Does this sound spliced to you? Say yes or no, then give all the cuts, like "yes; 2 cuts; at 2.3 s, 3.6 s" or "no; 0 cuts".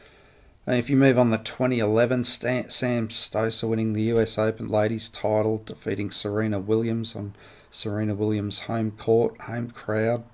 no; 0 cuts